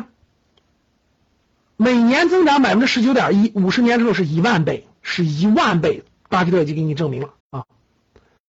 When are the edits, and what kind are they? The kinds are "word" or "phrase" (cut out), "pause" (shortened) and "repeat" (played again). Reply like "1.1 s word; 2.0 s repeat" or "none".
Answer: 7.4 s pause

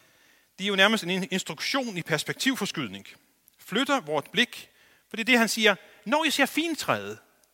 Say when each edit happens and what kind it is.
none

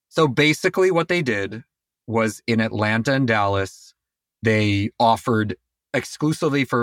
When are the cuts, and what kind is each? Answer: none

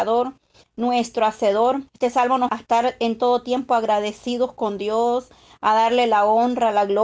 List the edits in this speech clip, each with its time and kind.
1.9 s pause; 2.5 s word

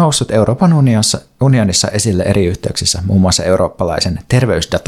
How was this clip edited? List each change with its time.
none

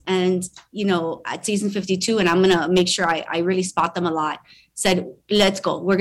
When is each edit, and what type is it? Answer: none

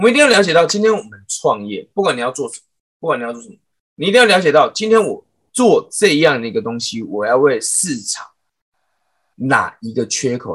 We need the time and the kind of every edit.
none

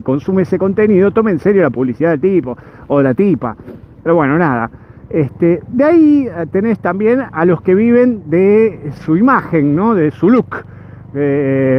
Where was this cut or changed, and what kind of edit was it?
none

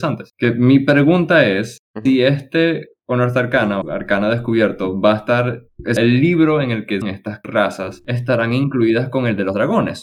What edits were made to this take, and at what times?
3.0 s pause; 3.8 s word; 6.0 s word; 7.0 s word

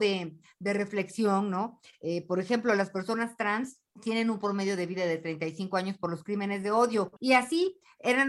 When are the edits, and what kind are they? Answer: 3.9 s pause; 7.2 s pause

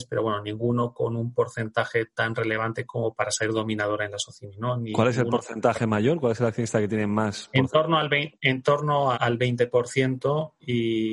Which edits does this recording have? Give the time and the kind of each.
9.1 s word

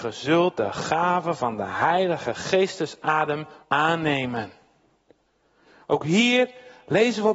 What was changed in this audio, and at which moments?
3.6 s word

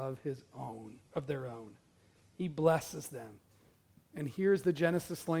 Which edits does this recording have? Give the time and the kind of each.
none

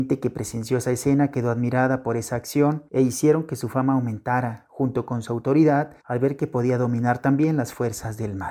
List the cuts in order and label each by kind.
2.9 s pause; 6.0 s pause

